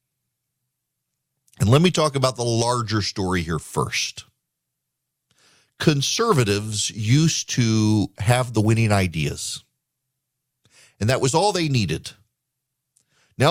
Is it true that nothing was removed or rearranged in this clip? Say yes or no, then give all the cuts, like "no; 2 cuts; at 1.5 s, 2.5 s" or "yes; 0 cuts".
yes; 0 cuts